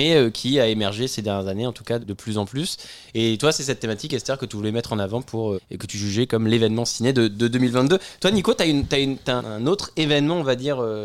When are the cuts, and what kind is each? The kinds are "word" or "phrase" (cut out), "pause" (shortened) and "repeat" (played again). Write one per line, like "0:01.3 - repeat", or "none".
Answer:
0:02.0 - word
0:05.6 - word
0:09.4 - word